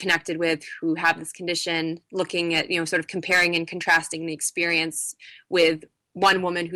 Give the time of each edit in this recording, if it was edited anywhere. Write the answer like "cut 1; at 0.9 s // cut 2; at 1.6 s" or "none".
none